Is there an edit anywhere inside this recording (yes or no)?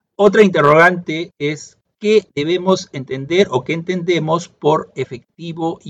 yes